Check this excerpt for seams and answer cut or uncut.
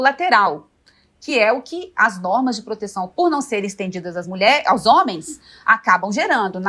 uncut